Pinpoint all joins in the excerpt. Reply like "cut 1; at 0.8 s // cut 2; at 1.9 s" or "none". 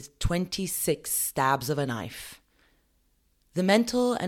none